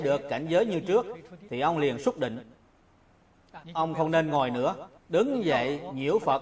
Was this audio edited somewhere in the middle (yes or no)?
yes